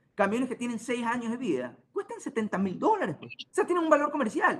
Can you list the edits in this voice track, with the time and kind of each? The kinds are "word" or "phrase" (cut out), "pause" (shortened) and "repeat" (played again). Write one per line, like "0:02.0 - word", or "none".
0:01.8 - pause
0:03.5 - pause